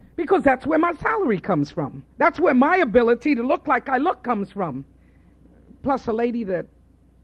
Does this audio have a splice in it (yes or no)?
yes